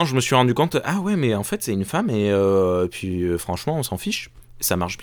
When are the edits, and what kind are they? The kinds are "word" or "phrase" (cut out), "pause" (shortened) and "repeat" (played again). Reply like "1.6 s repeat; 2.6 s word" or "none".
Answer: none

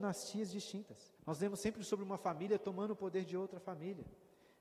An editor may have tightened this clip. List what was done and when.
1.2 s pause

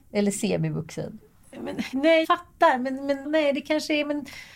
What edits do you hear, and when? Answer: 1.9 s word; 2.2 s word; 3.2 s word

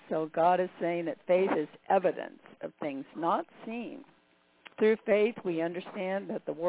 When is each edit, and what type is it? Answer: 4.7 s pause

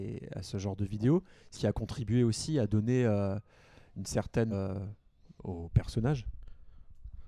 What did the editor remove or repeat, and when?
1.5 s word; 4.5 s word

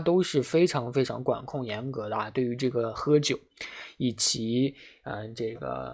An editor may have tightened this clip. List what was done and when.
none

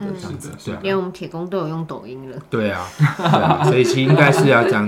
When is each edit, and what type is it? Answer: none

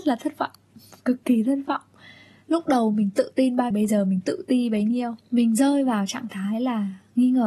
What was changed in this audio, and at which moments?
3.7 s phrase; 5.2 s pause

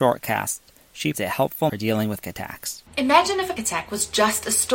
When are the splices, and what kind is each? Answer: 1.1 s word; 1.7 s phrase; 2.2 s word; 2.9 s pause; 3.6 s word

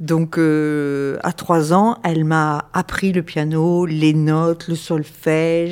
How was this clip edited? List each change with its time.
none

